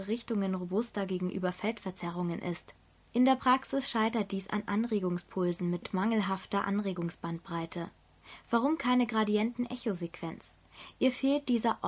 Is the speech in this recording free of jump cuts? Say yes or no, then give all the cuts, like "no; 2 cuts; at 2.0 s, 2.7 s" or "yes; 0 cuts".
yes; 0 cuts